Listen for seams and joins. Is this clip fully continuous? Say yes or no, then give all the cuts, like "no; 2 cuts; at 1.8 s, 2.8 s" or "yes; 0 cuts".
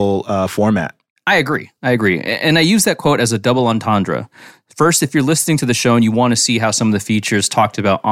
yes; 0 cuts